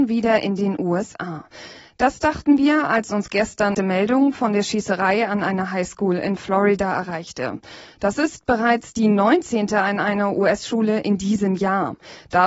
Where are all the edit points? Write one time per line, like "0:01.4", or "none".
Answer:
0:03.7